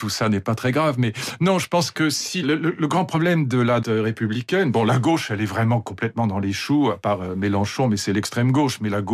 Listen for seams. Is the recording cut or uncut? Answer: cut